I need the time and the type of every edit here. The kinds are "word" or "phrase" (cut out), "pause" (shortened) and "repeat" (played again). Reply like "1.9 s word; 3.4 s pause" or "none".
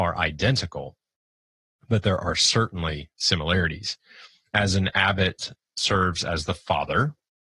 none